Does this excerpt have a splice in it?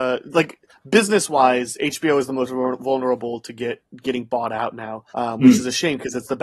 yes; 1 cut; at 5.1 s

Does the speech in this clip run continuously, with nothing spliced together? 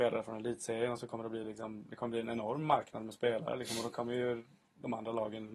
yes; 0 cuts

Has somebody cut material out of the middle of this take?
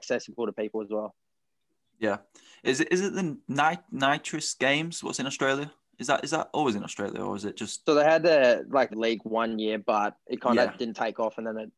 yes; 2 cuts; at 7.9 s, 8.9 s

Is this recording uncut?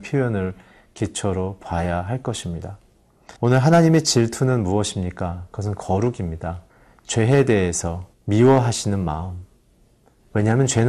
no; 3 cuts; at 3.4 s, 6.7 s, 8.1 s

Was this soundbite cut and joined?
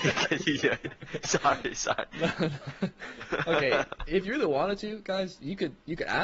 no; 0 cuts

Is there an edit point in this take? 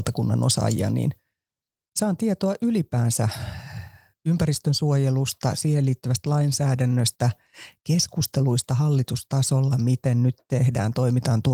no; 0 cuts

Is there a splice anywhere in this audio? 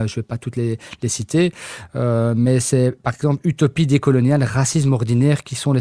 no; 0 cuts

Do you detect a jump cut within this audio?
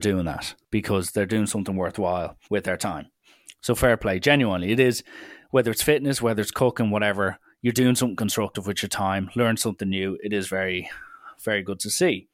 yes; 1 cut; at 2.4 s

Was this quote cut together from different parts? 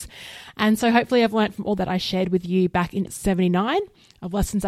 yes; 2 cuts; at 1.8 s, 3.0 s

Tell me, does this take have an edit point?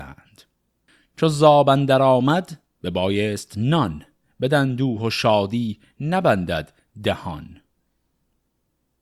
no; 0 cuts

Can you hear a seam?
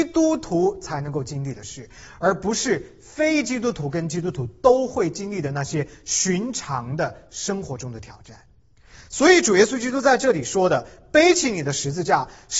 no; 0 cuts

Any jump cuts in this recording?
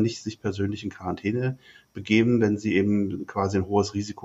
no; 0 cuts

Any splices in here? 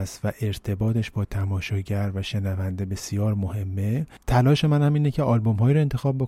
yes; 1 cut; at 4.2 s

